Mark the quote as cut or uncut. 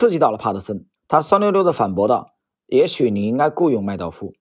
cut